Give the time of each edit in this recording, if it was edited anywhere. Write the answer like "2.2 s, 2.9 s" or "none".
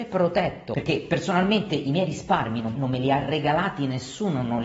2.7 s